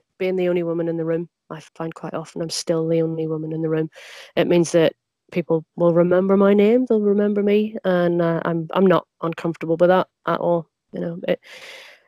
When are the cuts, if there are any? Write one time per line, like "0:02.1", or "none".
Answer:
0:01.7
0:05.7
0:10.2
0:10.8